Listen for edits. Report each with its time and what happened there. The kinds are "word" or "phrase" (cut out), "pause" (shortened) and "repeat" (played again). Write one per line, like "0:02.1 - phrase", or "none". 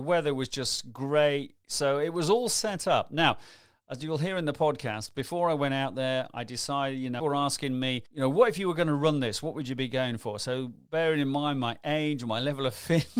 0:07.2 - phrase
0:08.1 - pause